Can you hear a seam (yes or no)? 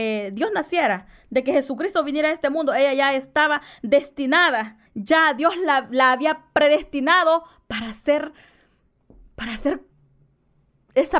yes